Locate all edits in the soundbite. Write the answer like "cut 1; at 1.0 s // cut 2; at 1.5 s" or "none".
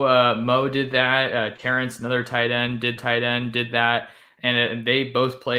cut 1; at 3.0 s